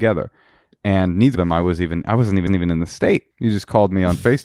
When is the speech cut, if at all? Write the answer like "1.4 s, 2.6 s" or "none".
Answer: 1.3 s, 2.5 s, 3.3 s